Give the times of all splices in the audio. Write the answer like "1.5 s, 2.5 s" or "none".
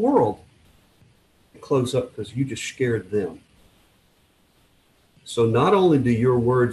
1.5 s